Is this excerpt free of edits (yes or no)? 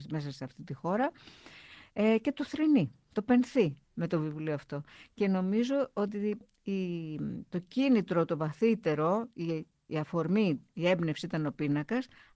yes